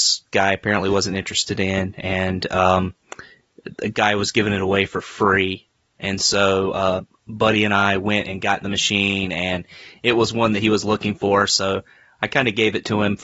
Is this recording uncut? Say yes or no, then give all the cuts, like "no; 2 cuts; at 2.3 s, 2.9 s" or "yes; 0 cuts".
yes; 0 cuts